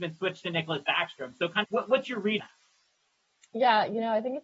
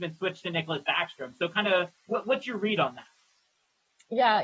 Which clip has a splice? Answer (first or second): first